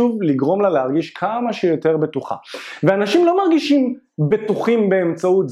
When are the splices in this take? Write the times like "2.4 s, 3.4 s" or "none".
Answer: none

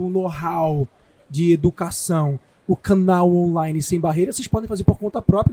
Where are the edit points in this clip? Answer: none

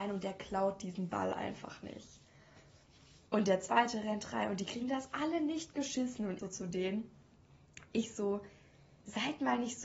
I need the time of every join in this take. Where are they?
6.4 s

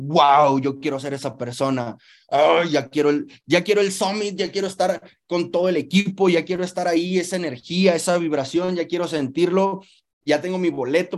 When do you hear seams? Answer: none

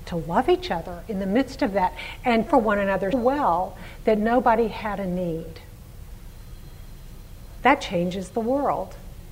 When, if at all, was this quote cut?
2.5 s, 3.1 s

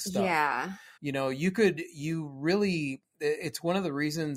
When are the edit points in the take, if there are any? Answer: 1.0 s

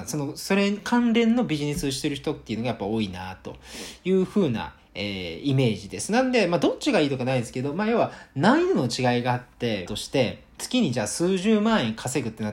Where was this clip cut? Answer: 9.9 s

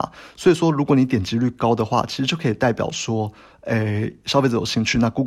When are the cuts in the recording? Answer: none

